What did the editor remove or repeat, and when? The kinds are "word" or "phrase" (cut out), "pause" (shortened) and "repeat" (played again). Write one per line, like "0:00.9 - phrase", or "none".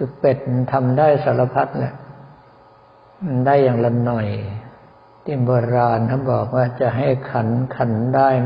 0:04.9 - pause